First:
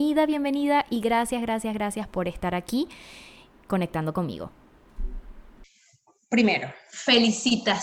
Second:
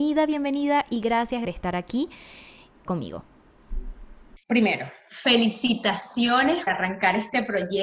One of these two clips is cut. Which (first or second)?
second